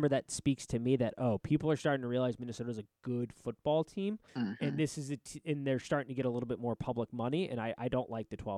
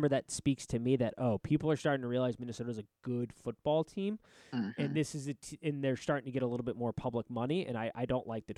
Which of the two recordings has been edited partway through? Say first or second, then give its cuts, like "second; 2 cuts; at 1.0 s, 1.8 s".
first; 1 cut; at 4.3 s